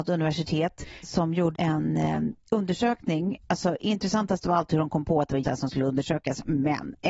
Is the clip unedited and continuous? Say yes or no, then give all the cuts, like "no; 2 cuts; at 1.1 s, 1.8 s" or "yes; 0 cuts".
no; 3 cuts; at 1.0 s, 1.5 s, 5.4 s